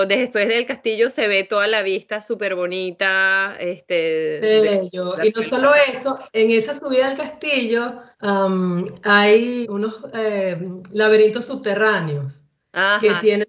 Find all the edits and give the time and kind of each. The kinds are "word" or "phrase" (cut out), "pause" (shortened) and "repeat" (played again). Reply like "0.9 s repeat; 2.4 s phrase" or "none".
6.3 s pause; 8.1 s pause; 9.6 s word